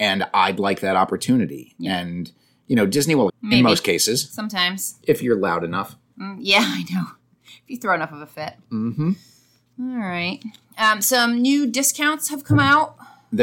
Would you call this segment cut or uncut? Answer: cut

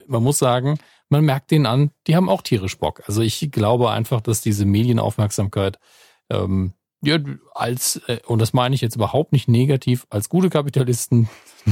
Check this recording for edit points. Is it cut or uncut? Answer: uncut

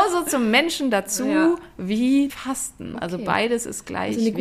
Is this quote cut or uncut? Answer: cut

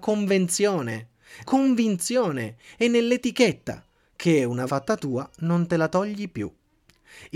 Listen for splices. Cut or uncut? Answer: cut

